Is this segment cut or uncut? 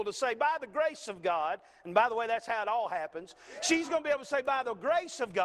uncut